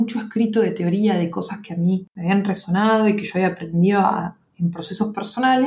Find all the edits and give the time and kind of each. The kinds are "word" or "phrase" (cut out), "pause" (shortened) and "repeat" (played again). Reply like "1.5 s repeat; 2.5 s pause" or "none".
2.1 s pause

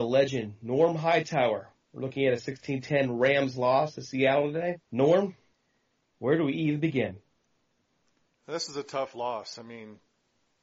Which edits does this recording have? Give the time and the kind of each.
4.8 s pause

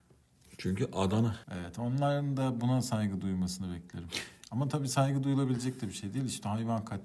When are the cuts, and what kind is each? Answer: 1.4 s pause

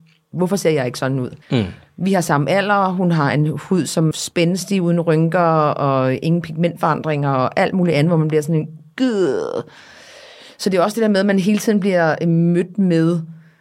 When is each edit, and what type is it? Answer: 1.4 s pause; 4.1 s word

